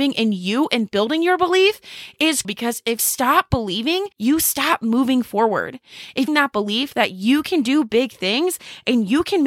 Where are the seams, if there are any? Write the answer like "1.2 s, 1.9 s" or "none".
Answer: 2.4 s, 3.0 s, 4.1 s, 6.3 s

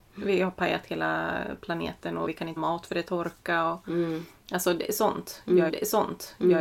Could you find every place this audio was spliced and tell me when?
2.3 s, 2.6 s, 5.7 s

